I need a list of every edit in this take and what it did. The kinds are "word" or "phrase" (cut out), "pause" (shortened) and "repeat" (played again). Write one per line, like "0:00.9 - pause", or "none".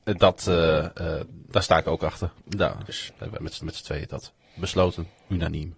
0:02.4 - pause
0:03.6 - repeat

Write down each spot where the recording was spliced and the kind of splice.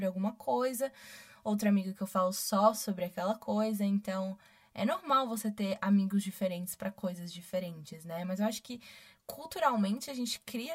none

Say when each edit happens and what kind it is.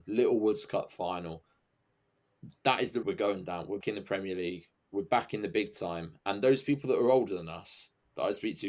0:03.0 - word
0:03.8 - word

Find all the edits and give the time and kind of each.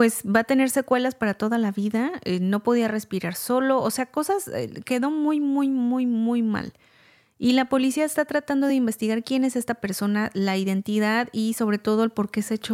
none

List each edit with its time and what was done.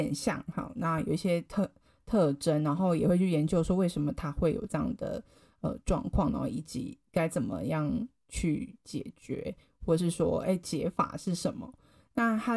none

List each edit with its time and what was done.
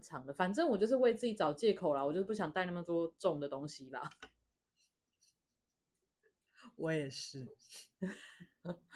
0:07.9 - pause

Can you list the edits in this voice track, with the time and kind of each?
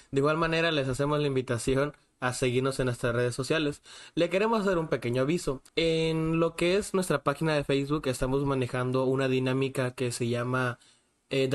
0:05.7 - pause

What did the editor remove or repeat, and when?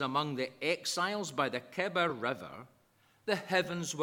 none

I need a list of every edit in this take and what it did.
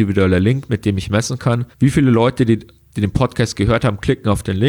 0:01.7 - pause

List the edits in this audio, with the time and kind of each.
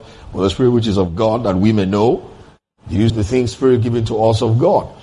0:03.1 - word

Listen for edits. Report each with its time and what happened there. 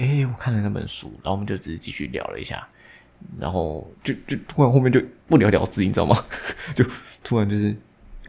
0:05.2 - pause

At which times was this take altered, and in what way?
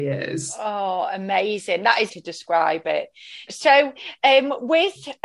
0:02.1 - phrase
0:03.5 - word

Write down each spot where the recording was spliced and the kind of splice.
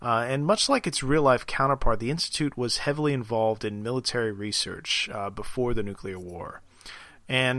none

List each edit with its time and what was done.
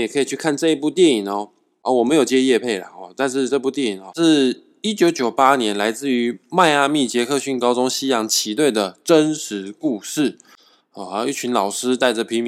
0:04.1 - word

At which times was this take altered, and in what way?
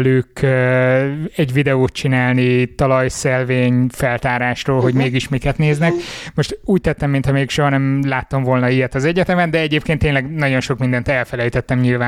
none

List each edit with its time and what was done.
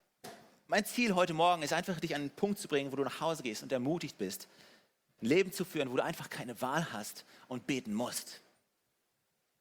none

